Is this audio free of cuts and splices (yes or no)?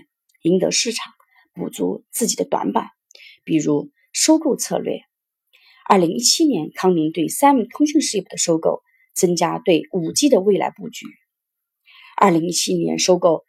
yes